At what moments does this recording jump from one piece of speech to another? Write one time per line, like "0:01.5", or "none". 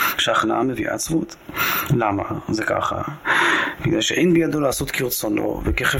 none

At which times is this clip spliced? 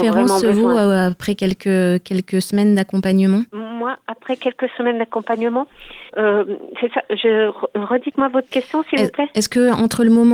0:03.5
0:06.1

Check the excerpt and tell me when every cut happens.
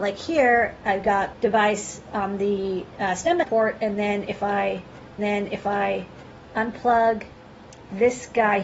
0:01.3
0:03.4
0:05.2

